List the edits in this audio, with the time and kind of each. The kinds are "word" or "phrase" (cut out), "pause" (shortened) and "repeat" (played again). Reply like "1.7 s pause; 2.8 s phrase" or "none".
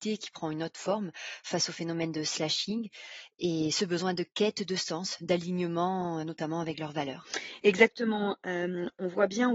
6.2 s word